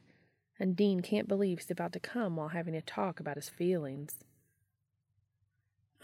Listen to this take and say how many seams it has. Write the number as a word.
one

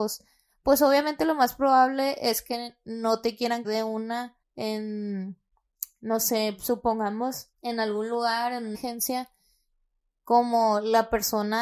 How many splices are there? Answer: four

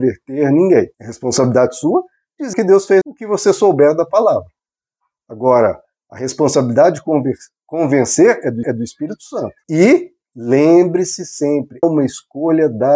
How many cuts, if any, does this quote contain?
six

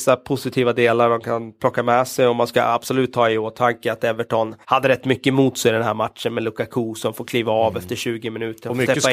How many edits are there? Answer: one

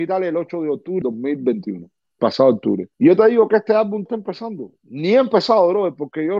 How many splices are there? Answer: four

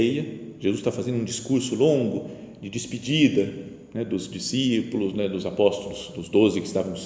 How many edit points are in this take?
zero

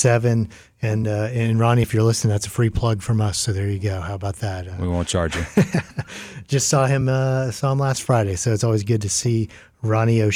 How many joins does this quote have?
zero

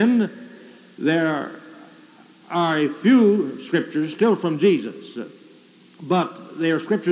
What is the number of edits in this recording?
zero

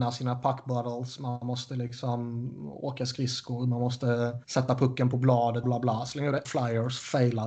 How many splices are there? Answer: three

